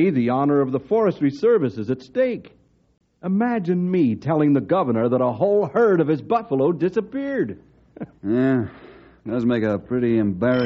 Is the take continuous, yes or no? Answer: yes